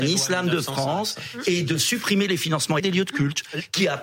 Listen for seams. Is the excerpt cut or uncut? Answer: cut